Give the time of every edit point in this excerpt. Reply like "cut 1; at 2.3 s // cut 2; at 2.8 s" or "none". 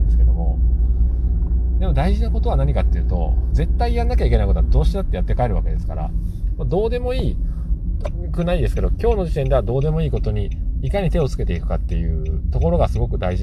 cut 1; at 3.5 s